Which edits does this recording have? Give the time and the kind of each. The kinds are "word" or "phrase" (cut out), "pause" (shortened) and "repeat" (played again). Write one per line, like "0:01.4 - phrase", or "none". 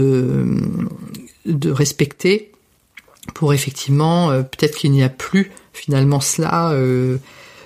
none